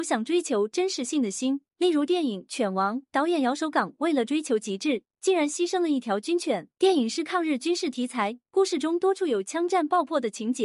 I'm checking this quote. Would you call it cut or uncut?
cut